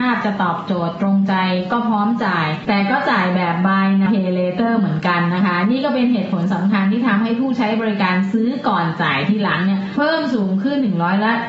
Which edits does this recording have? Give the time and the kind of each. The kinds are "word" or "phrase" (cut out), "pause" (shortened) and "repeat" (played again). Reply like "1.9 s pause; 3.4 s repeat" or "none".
4.1 s word